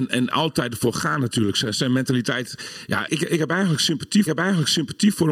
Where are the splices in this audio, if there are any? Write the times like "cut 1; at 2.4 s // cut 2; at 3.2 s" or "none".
cut 1; at 3.1 s // cut 2; at 4.3 s